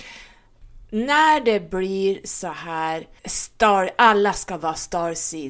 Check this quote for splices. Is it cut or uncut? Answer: cut